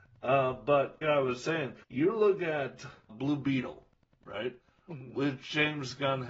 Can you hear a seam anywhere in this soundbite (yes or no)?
yes